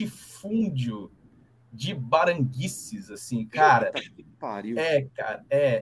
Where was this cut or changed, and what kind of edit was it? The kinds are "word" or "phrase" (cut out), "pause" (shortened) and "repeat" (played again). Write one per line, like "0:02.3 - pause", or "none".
none